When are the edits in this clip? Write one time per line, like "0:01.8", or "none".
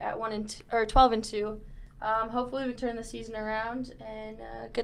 0:02.8